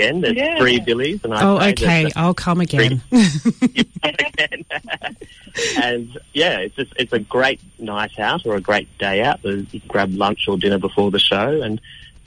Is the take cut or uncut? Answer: cut